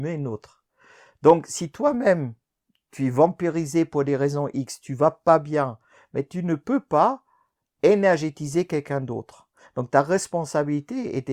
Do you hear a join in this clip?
no; 0 cuts

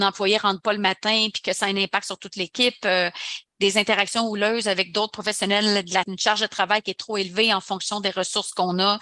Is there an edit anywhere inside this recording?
yes; 1 cut; at 6.0 s

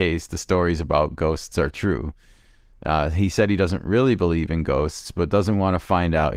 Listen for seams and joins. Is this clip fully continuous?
yes; 0 cuts

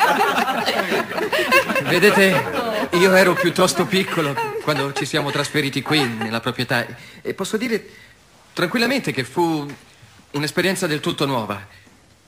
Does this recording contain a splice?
no; 0 cuts

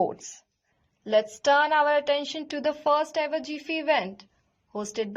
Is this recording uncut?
yes; 0 cuts

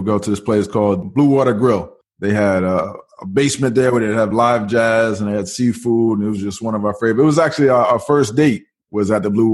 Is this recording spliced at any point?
no; 0 cuts

